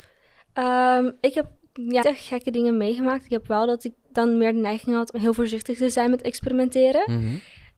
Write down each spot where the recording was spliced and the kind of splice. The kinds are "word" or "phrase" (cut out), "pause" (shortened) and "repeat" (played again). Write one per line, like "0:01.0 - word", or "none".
0:02.0 - word
0:05.1 - word